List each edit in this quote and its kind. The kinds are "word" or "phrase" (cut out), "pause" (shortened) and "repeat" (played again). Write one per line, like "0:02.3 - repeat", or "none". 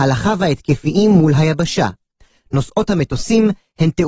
none